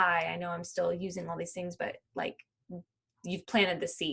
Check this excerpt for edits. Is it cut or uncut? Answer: uncut